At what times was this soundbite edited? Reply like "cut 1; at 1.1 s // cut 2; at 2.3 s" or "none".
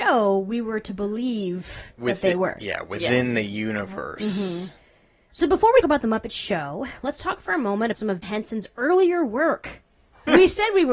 cut 1; at 5.8 s // cut 2; at 7.9 s // cut 3; at 8.2 s